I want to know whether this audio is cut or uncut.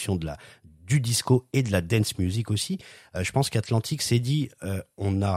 uncut